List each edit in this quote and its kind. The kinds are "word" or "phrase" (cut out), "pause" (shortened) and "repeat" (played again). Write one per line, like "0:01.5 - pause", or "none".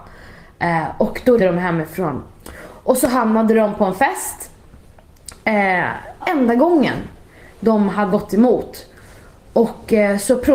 0:01.4 - word
0:06.2 - phrase
0:08.1 - word